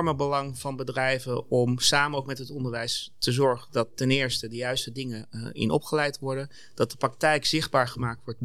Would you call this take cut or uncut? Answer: uncut